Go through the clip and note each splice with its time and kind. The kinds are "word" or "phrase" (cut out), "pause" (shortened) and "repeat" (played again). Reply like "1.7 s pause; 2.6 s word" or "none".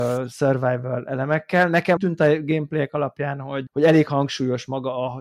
2.0 s word; 3.7 s word

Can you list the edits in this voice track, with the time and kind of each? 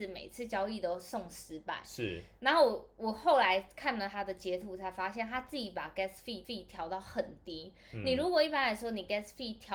6.4 s repeat

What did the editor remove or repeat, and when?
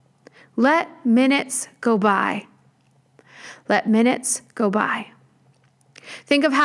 none

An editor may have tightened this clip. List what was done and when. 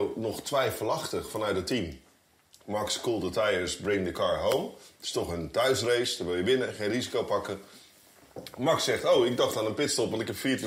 none

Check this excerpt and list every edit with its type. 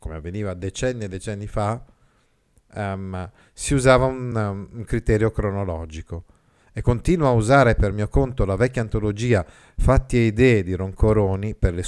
none

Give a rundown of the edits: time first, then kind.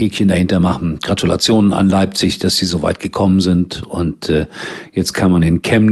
none

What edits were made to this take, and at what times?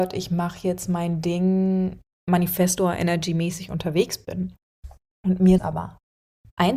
5.6 s word

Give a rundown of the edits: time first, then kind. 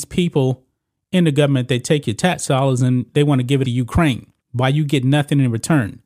3.6 s phrase; 4.4 s pause

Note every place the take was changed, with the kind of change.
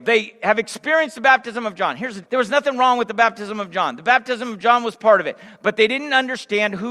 2.2 s word

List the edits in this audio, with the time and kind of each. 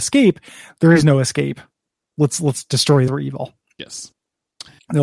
3.1 s phrase

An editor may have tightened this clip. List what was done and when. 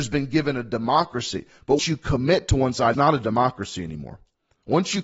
1.8 s word; 2.9 s word

